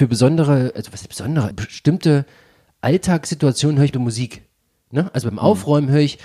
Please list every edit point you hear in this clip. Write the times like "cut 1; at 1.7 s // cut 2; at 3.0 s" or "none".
cut 1; at 1.5 s // cut 2; at 3.9 s